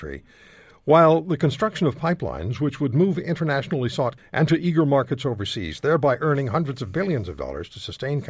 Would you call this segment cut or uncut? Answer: cut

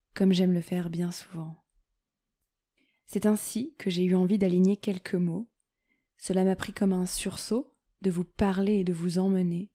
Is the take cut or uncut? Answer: uncut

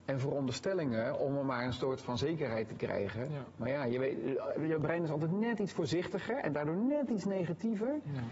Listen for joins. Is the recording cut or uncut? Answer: uncut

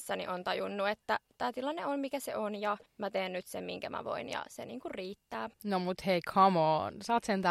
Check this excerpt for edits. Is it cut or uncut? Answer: cut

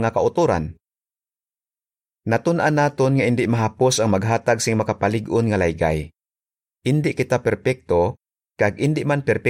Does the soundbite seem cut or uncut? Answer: uncut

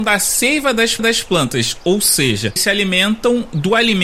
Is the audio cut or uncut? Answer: cut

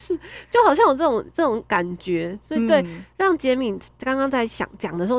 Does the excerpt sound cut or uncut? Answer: uncut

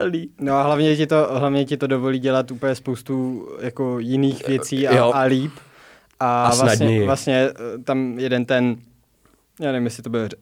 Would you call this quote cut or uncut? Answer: uncut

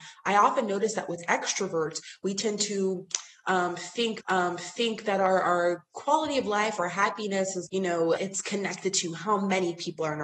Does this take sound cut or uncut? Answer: cut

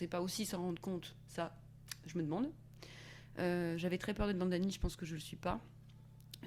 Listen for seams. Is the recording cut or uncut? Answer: uncut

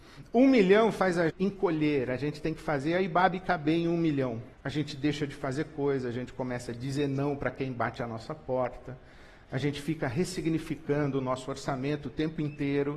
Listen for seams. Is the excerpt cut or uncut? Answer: cut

